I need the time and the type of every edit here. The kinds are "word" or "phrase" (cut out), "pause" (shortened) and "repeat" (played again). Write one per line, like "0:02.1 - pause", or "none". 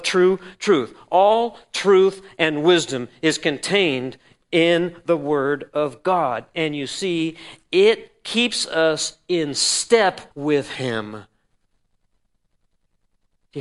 0:10.3 - pause